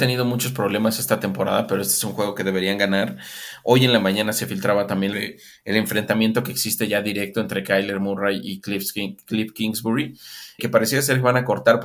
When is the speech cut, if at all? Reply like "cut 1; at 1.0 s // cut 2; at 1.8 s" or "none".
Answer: cut 1; at 5.1 s // cut 2; at 10.6 s